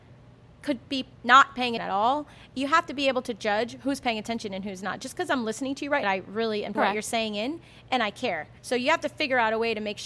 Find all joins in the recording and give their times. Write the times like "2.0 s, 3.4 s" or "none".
1.1 s, 1.8 s, 6.0 s, 6.7 s, 8.6 s